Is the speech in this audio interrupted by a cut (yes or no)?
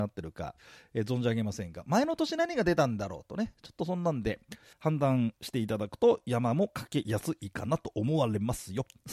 yes